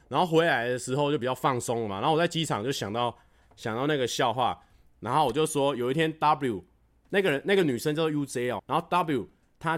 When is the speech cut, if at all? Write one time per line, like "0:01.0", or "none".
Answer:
0:08.6

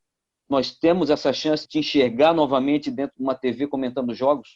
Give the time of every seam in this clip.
0:01.6

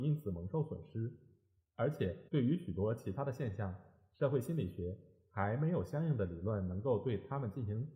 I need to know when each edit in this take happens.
0:02.3

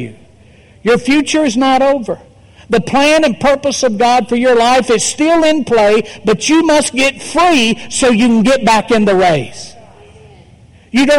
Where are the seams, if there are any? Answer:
none

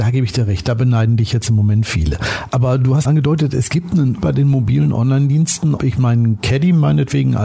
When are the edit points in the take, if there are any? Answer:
0:03.0
0:04.2
0:05.8

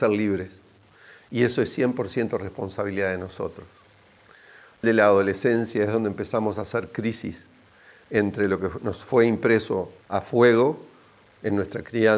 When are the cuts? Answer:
0:04.8
0:10.0

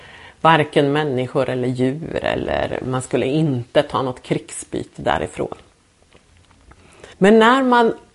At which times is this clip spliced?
0:07.1

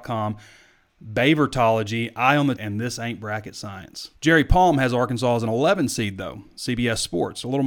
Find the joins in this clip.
0:02.6
0:04.2

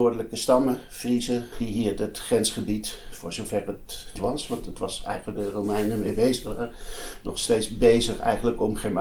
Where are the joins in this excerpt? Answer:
0:01.5
0:04.2
0:05.4

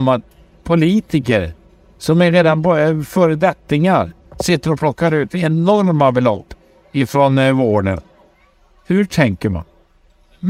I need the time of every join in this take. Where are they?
none

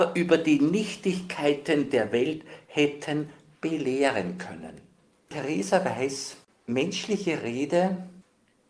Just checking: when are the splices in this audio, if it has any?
none

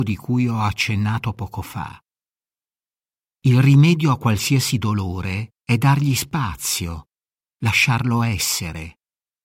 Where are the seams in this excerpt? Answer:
0:05.5

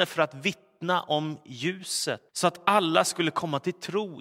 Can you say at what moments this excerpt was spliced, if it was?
0:02.3

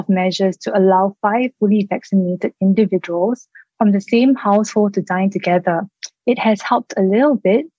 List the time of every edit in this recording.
none

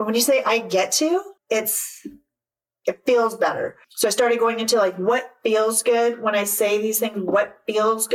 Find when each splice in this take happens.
0:01.4
0:03.8

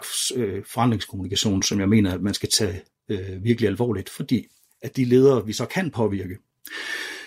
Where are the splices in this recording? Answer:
none

